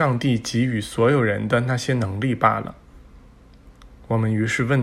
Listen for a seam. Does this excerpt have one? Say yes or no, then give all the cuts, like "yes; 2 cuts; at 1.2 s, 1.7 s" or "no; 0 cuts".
no; 0 cuts